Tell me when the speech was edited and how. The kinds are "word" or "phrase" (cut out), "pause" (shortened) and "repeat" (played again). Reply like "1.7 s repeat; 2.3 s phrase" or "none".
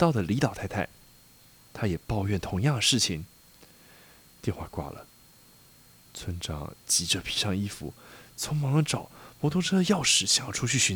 none